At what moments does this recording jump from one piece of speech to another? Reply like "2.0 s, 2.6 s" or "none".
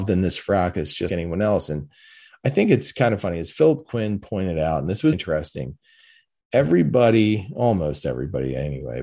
1.1 s, 5.1 s